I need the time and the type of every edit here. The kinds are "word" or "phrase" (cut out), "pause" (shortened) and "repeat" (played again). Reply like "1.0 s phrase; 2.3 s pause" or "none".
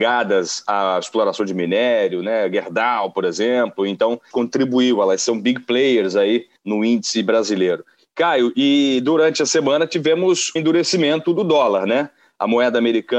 4.3 s phrase; 6.6 s pause; 10.6 s word

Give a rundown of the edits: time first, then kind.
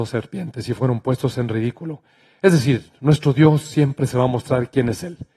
none

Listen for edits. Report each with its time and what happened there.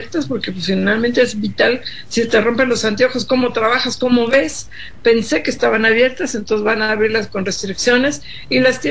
none

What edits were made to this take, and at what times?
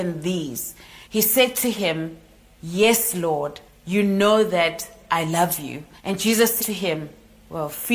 1.0 s pause; 3.7 s pause; 6.0 s pause; 6.6 s word

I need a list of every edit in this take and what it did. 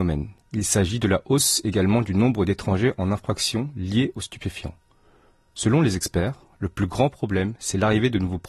none

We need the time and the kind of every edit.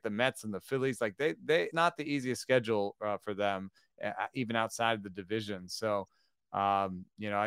1.7 s word

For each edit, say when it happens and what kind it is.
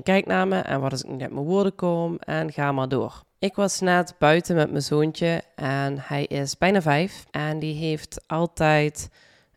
3.3 s pause; 7.3 s pause

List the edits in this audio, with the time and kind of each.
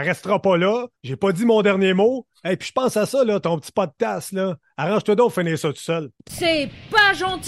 1.0 s pause; 6.2 s pause

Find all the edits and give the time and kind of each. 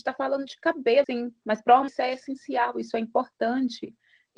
1.0 s word; 1.9 s word

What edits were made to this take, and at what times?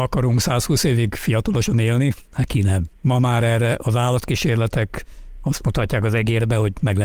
2.2 s pause; 2.9 s pause

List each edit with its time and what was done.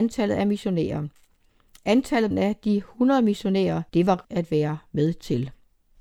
2.3 s phrase; 3.9 s pause; 4.2 s word

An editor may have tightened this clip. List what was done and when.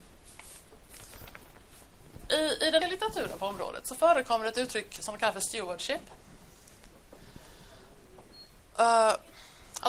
2.8 s word

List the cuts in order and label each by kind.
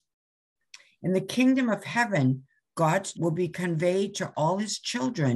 3.1 s word

